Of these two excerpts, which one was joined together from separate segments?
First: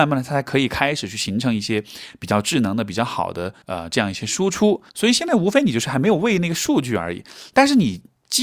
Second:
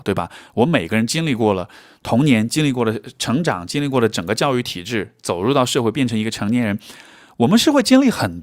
first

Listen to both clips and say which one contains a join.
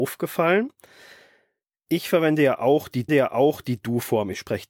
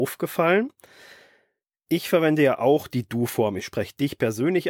first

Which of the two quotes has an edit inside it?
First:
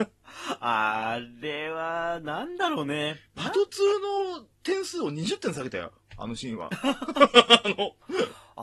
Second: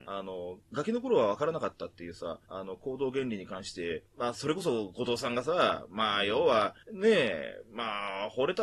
second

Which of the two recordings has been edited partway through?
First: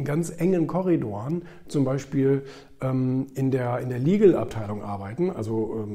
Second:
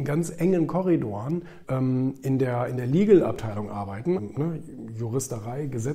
second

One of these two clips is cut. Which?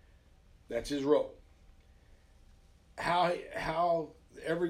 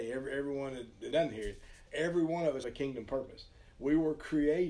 second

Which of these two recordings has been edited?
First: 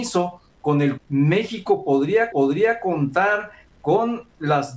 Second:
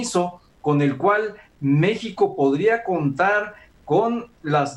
first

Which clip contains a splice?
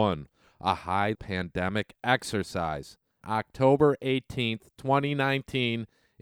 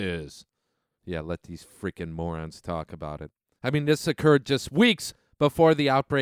first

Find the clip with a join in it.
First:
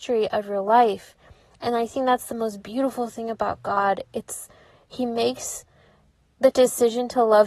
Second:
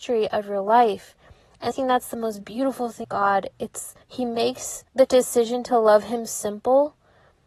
second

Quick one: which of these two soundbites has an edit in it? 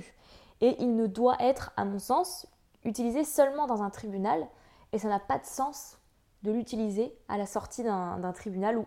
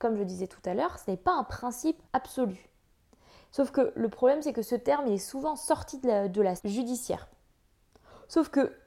second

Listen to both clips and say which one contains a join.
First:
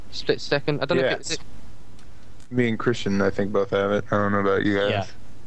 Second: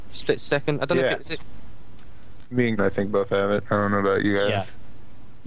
second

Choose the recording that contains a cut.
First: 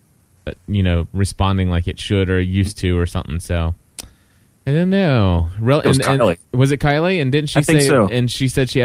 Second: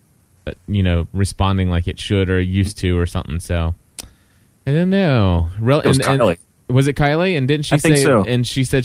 first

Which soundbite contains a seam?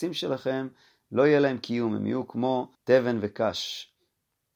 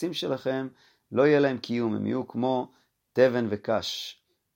first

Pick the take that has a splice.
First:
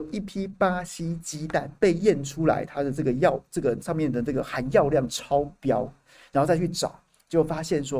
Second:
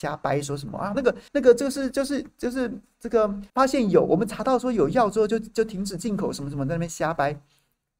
second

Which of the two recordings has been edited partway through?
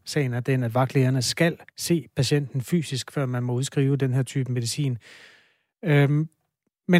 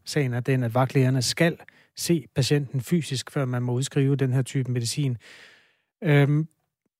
first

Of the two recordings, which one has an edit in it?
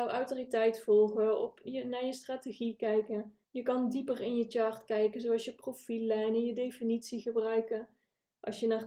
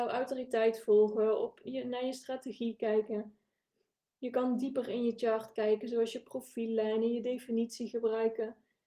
first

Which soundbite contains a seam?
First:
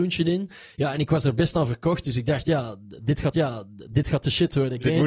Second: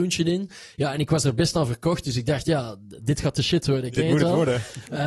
first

